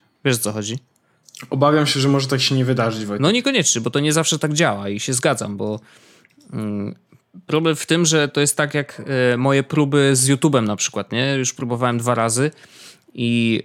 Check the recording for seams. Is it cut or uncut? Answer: uncut